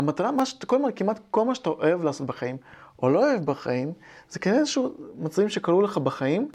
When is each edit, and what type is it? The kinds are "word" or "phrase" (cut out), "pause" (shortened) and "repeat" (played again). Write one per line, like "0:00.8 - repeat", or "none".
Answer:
none